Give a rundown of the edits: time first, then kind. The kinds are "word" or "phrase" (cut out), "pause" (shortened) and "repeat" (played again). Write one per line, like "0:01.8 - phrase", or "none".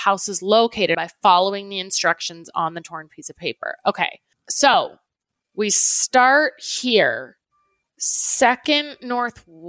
0:00.9 - word